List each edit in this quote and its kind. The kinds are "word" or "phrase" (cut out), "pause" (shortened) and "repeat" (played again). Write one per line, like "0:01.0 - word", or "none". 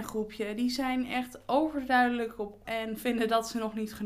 0:02.6 - word